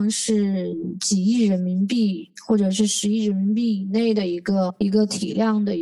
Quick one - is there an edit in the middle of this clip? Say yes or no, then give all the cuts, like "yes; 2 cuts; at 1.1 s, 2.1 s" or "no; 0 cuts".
no; 0 cuts